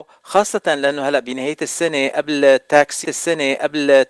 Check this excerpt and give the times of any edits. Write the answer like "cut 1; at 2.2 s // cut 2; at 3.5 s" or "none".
cut 1; at 3.0 s